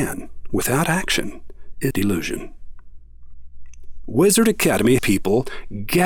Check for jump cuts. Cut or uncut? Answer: cut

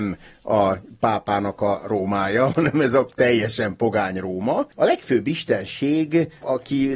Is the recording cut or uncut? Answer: cut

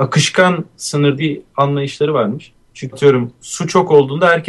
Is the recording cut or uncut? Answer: cut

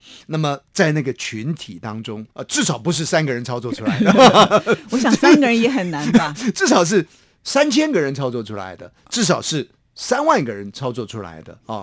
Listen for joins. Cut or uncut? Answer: cut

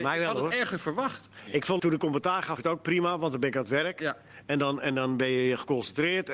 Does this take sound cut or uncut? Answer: cut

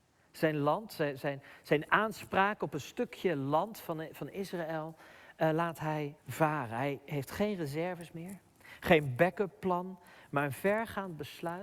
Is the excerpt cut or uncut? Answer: cut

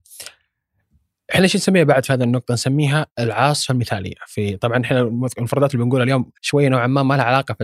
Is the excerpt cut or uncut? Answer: cut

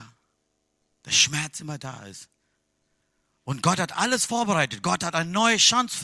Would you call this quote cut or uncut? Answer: uncut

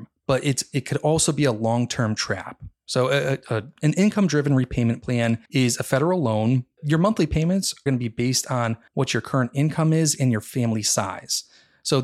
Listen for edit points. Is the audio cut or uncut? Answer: cut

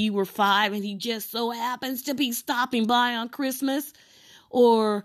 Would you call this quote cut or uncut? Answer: uncut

